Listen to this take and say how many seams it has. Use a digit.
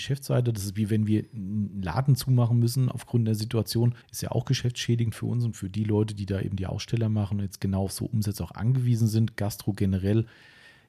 1